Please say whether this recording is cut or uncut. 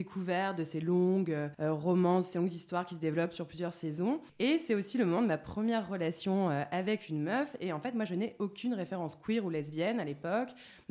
cut